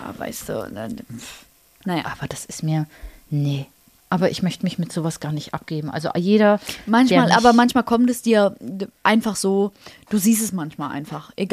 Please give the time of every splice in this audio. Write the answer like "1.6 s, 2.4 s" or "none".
none